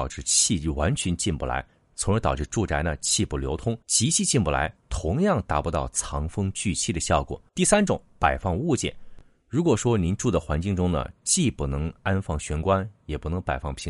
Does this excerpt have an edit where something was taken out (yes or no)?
yes